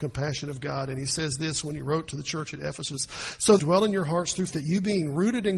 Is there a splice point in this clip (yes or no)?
yes